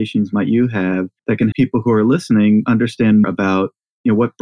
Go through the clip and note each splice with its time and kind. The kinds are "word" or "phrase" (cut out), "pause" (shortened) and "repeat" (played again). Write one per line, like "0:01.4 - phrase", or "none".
0:01.2 - pause
0:01.5 - word
0:03.2 - word